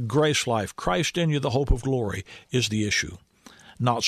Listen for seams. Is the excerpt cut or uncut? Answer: uncut